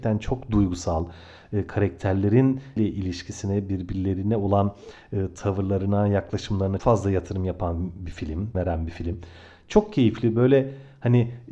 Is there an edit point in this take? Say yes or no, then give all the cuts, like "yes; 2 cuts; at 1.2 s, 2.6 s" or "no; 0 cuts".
yes; 3 cuts; at 2.8 s, 6.8 s, 8.5 s